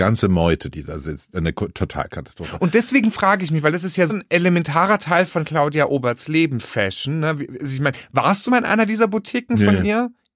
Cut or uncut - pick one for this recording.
cut